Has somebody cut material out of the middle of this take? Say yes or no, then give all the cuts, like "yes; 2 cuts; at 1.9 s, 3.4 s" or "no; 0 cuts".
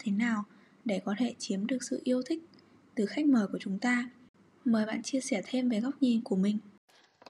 no; 0 cuts